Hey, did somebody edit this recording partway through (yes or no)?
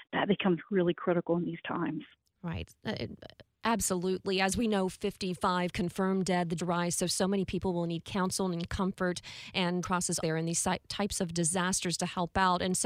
yes